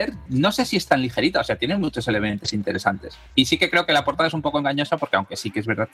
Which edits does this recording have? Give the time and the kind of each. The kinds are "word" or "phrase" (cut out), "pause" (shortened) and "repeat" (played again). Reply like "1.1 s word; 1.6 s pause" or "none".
3.3 s pause